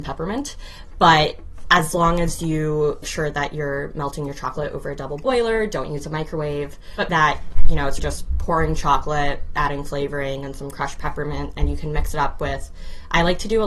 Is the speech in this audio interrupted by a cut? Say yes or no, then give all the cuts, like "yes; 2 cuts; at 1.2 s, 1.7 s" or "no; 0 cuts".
yes; 3 cuts; at 3.0 s, 7.1 s, 8.0 s